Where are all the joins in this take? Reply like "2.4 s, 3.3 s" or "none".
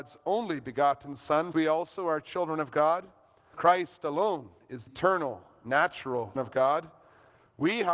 1.5 s, 3.5 s, 4.9 s, 6.4 s

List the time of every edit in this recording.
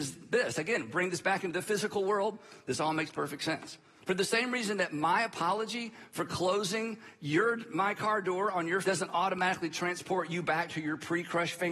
8.8 s

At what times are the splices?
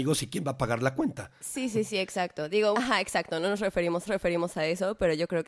2.7 s, 4.1 s

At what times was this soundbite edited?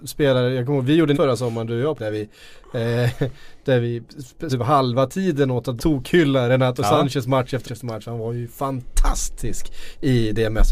1.1 s, 2.0 s, 4.5 s, 5.8 s, 7.6 s

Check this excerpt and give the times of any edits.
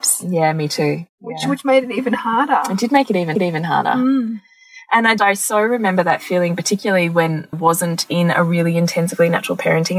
1.1 s, 3.3 s, 5.2 s, 7.5 s

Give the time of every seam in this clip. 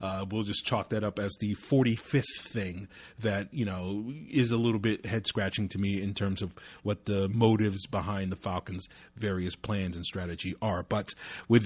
none

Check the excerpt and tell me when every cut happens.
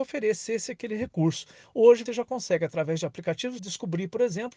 2.1 s, 3.6 s

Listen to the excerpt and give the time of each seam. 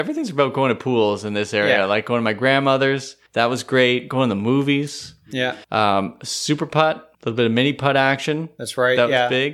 3.3 s, 5.6 s, 7.1 s

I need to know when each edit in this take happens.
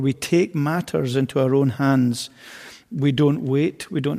none

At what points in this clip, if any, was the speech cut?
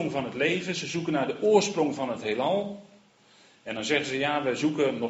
none

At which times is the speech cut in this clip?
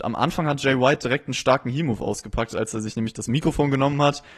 none

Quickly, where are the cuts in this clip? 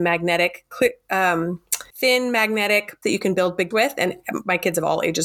1.9 s, 3.0 s, 3.7 s

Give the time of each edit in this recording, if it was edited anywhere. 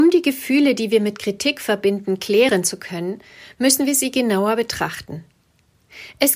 none

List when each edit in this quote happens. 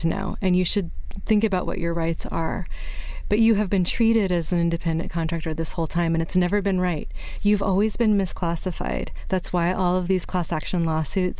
none

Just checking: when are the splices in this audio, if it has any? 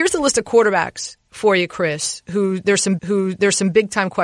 3.0 s

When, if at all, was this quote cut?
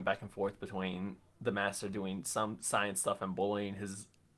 none

